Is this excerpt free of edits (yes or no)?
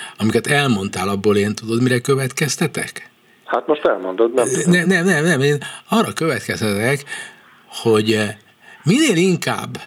yes